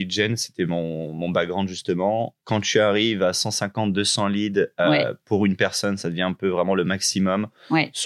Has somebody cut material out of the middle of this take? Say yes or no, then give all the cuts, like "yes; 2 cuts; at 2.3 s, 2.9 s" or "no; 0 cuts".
yes; 1 cut; at 2.4 s